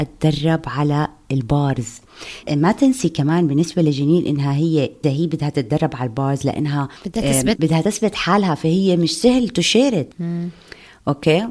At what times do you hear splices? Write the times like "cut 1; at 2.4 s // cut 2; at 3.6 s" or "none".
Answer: cut 1; at 2.4 s // cut 2; at 5.0 s // cut 3; at 7.0 s // cut 4; at 7.6 s // cut 5; at 10.1 s

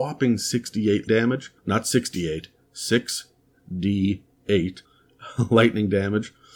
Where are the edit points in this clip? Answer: cut 1; at 1.1 s // cut 2; at 1.6 s // cut 3; at 4.9 s

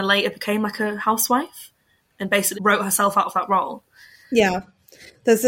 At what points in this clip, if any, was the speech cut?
cut 1; at 2.5 s

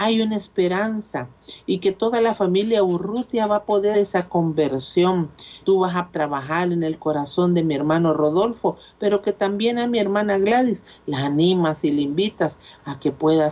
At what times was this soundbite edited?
cut 1; at 3.9 s // cut 2; at 5.6 s // cut 3; at 6.1 s

